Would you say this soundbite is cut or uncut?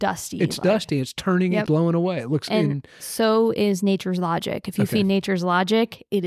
cut